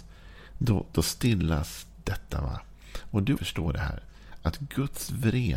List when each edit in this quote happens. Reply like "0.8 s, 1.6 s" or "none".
3.4 s